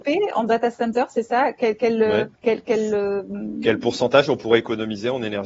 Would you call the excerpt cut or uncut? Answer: cut